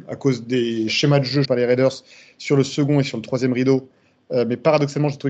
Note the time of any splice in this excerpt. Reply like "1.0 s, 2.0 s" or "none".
1.4 s